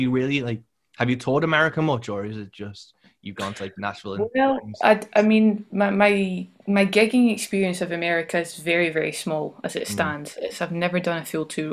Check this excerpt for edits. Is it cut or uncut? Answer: uncut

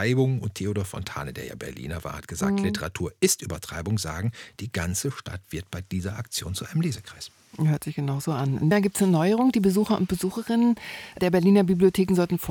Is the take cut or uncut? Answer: cut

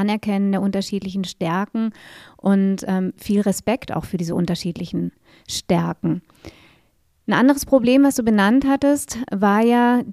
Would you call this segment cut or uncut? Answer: uncut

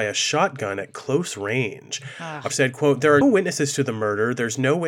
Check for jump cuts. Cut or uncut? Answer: cut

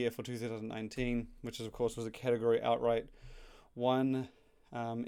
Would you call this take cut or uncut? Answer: uncut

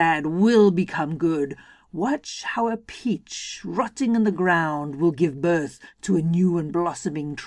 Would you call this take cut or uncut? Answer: uncut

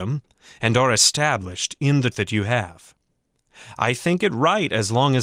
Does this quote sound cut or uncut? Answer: cut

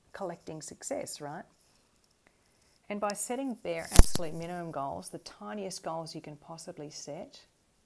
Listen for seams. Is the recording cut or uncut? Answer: cut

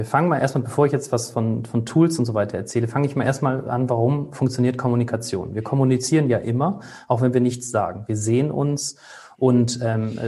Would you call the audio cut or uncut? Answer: uncut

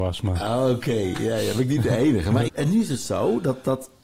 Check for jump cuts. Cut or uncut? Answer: cut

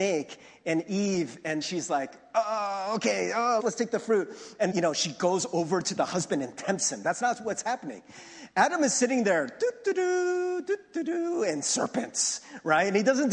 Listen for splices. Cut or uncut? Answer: cut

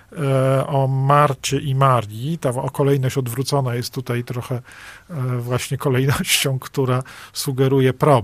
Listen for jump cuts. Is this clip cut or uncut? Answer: uncut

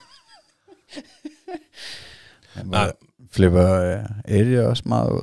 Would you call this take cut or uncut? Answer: cut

